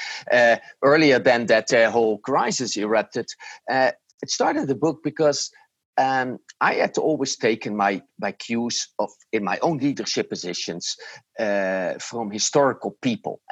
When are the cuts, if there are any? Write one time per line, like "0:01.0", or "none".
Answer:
none